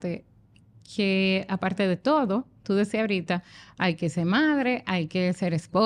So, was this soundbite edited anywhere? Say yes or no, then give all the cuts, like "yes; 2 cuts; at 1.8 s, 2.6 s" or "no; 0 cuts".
no; 0 cuts